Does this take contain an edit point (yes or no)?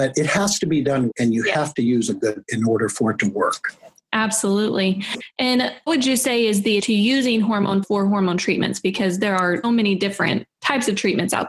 yes